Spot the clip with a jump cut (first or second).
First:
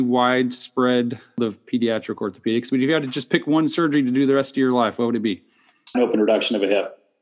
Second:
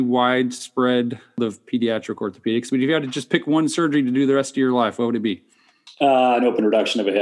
first